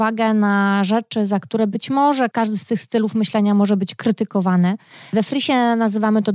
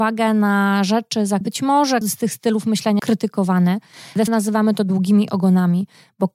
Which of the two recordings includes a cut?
second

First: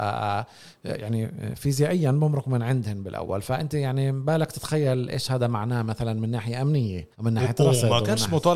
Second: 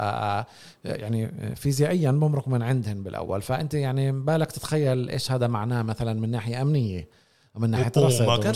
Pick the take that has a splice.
first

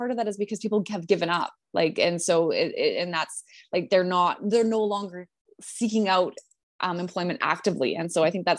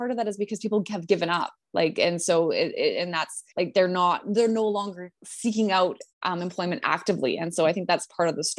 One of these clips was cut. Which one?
second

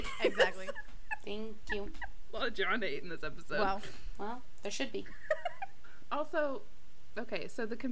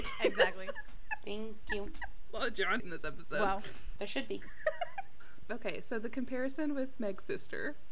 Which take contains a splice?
second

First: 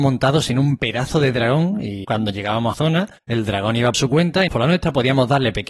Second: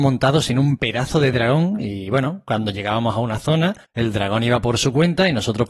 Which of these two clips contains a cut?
first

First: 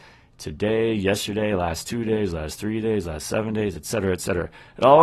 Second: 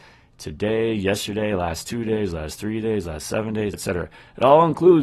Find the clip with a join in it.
second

